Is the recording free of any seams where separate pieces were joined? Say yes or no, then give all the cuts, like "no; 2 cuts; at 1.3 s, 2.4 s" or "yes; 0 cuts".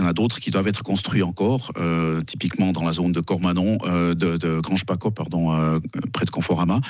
yes; 0 cuts